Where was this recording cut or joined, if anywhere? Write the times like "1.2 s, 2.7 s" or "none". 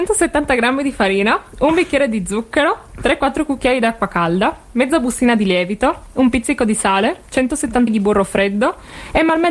7.9 s